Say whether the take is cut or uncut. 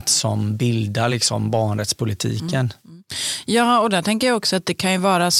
uncut